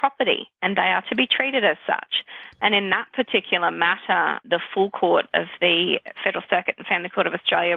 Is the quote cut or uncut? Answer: cut